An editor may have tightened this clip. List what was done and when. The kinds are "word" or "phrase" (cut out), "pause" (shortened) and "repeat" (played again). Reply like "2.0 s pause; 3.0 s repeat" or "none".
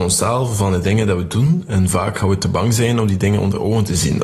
none